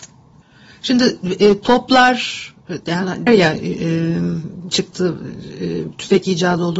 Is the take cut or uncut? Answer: cut